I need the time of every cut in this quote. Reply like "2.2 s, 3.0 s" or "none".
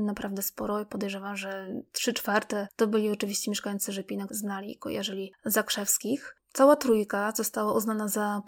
4.3 s